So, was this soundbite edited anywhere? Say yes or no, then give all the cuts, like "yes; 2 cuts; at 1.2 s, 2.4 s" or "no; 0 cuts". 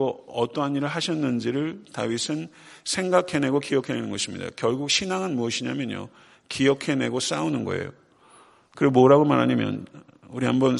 no; 0 cuts